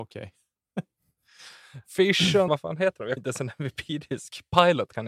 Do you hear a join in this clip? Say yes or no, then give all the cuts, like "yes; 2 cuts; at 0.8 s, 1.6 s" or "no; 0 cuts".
yes; 2 cuts; at 2.5 s, 3.2 s